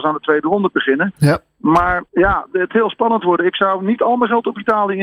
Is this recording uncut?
no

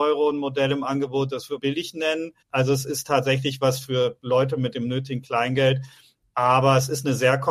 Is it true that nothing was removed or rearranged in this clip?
no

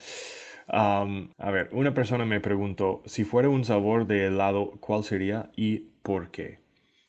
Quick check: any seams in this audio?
yes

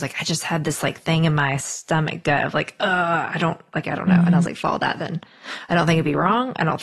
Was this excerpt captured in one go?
yes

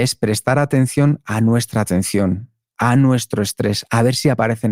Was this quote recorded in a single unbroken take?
yes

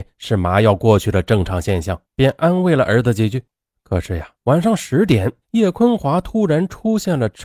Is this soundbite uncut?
no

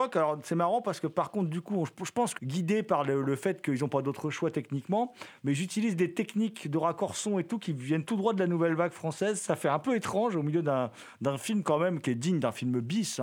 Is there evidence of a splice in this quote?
yes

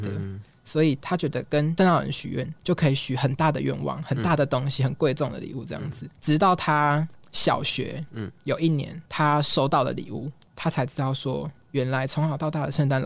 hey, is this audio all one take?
yes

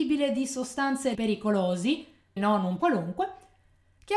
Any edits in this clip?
yes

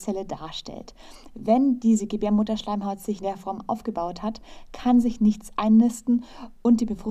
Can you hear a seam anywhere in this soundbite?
yes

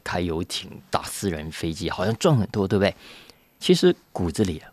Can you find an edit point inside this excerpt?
no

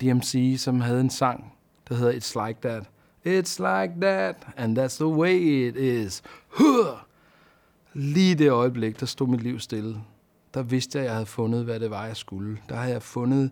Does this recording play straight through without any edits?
yes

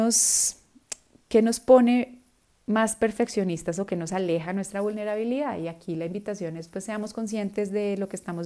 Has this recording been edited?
no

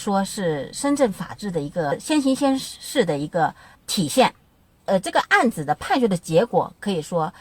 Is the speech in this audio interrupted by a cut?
no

